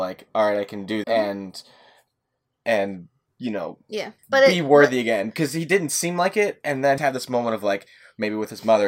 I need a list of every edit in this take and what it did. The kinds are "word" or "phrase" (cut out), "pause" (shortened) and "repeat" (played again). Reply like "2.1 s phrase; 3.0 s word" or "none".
1.0 s word; 3.3 s pause; 4.2 s pause; 7.0 s phrase